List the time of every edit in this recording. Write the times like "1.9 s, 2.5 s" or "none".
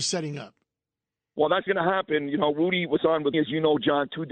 1.7 s, 3.3 s